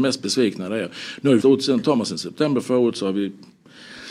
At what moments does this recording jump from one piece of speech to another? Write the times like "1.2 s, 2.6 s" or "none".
1.4 s